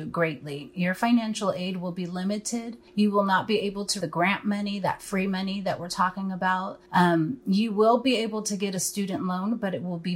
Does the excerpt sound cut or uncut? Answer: cut